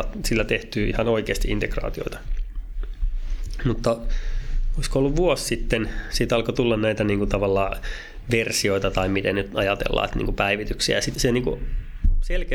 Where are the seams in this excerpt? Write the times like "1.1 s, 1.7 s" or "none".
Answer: 11.1 s